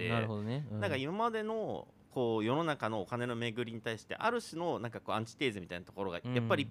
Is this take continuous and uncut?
yes; 0 cuts

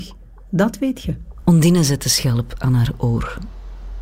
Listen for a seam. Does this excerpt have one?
no; 0 cuts

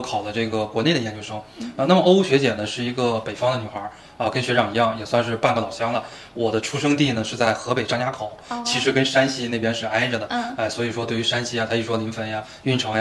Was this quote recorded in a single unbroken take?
yes; 0 cuts

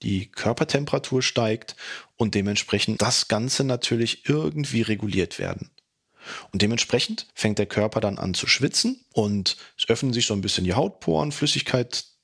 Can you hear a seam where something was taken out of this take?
yes; 2 cuts; at 3.0 s, 7.3 s

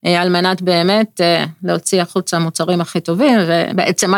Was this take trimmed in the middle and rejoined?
no; 0 cuts

